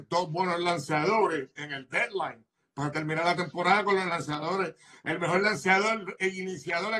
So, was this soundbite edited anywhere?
no; 0 cuts

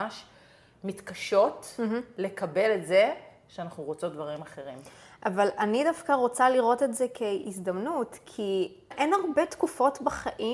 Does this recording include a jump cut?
yes; 1 cut; at 8.9 s

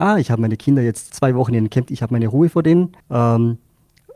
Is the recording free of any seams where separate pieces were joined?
no; 3 cuts; at 1.1 s, 1.9 s, 3.0 s

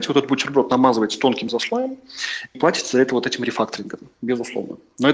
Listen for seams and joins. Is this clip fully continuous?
no; 2 cuts; at 1.5 s, 2.5 s

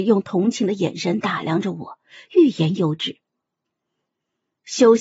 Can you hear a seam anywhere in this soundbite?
no; 0 cuts

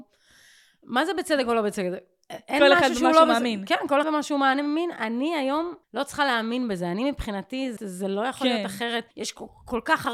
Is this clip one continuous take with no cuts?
no; 4 cuts; at 4.0 s, 5.8 s, 7.8 s, 9.1 s

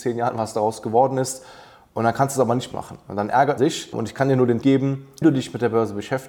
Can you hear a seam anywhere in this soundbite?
yes; 4 cuts; at 2.7 s, 3.6 s, 4.6 s, 5.2 s

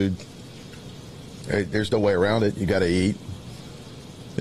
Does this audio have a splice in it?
no; 0 cuts

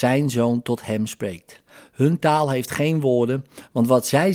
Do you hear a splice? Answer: no; 0 cuts

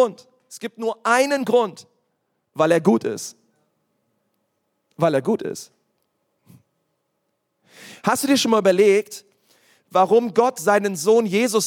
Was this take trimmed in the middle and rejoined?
no; 0 cuts

